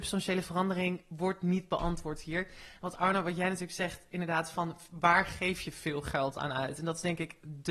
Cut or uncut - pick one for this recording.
uncut